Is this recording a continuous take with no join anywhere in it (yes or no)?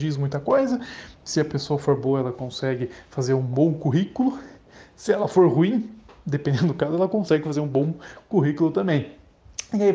yes